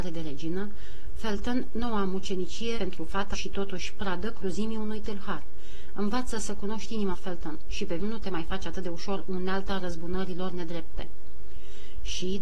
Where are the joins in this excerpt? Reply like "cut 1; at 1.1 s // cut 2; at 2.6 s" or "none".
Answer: cut 1; at 2.8 s // cut 2; at 3.3 s // cut 3; at 7.1 s // cut 4; at 8.0 s